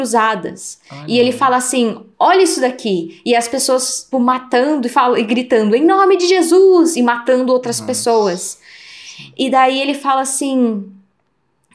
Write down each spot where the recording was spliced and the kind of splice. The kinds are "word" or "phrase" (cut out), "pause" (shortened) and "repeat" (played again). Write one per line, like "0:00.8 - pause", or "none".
0:04.1 - word